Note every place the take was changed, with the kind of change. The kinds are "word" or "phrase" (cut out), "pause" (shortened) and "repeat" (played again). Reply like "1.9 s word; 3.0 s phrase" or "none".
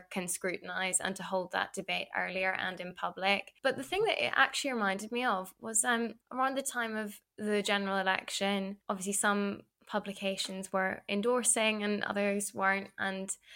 3.6 s pause; 6.2 s pause; 8.8 s pause